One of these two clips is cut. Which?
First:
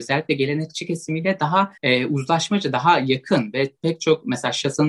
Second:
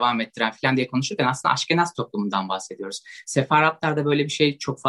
first; 1 cut; at 1.8 s

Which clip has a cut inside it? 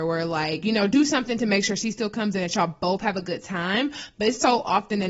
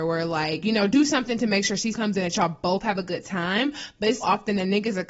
second; 2 cuts; at 1.9 s, 4.2 s

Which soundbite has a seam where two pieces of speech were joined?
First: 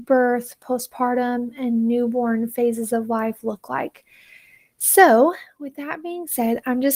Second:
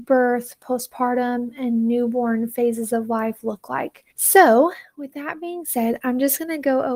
second; 1 cut; at 4.1 s

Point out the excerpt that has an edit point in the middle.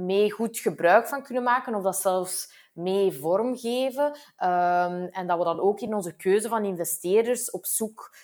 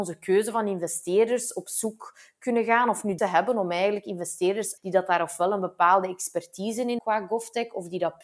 second; 3 cuts; at 3.2 s, 4.8 s, 7.0 s

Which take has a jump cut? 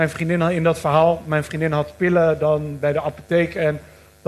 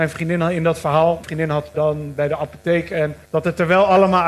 second; 3 cuts; at 1.2 s, 1.7 s, 3.2 s

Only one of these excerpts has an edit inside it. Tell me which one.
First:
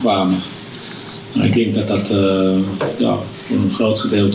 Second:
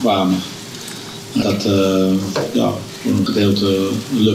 second; 2 cuts; at 1.4 s, 3.3 s

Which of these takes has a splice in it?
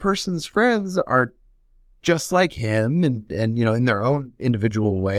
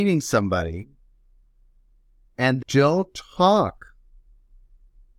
second; 1 cut; at 2.6 s

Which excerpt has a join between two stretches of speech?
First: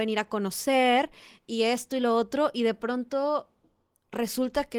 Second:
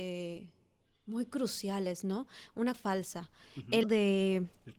second; 2 cuts; at 2.7 s, 3.8 s

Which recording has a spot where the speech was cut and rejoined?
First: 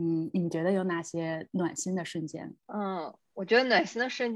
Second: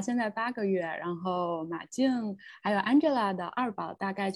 first; 1 cut; at 2.6 s

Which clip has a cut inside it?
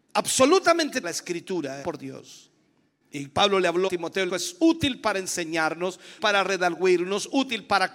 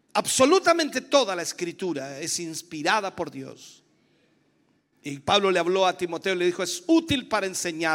first; 6 cuts; at 1.0 s, 1.8 s, 2.7 s, 3.9 s, 4.3 s, 6.2 s

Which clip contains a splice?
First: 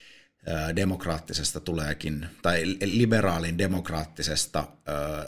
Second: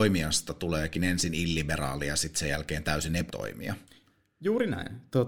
second; 1 cut; at 3.3 s

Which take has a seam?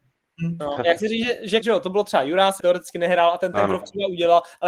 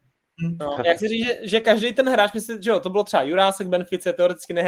first; 2 cuts; at 1.6 s, 2.6 s

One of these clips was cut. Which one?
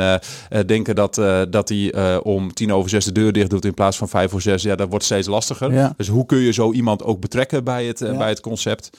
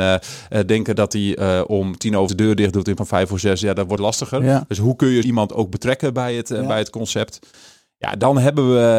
second; 5 cuts; at 1.0 s, 2.3 s, 3.0 s, 4.0 s, 5.2 s

